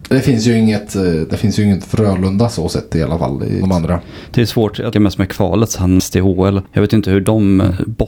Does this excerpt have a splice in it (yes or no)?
yes